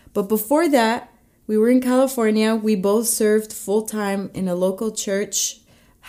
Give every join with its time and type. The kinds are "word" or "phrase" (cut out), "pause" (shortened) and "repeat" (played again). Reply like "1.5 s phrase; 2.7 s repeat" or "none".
none